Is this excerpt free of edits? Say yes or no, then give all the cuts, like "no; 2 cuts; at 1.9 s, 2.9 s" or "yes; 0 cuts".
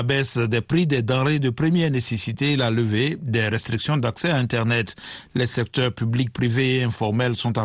yes; 0 cuts